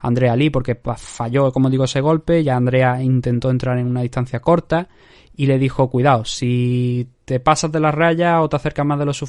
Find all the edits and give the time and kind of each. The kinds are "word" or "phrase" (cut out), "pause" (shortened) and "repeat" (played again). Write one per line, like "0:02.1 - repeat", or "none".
none